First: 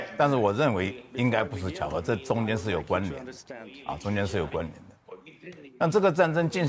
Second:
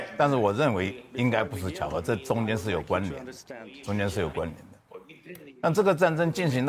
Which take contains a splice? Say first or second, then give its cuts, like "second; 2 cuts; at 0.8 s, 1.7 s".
second; 1 cut; at 3.8 s